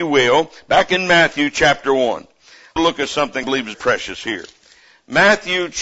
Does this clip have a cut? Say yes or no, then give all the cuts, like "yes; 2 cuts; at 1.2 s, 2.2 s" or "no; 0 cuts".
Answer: yes; 3 cuts; at 2.8 s, 3.4 s, 3.7 s